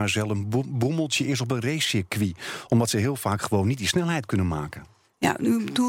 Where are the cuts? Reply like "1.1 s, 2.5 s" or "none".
none